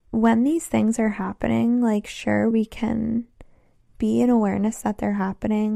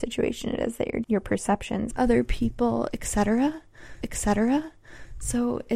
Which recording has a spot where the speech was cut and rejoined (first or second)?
second